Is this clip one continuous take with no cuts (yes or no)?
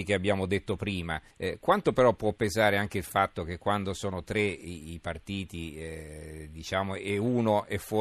no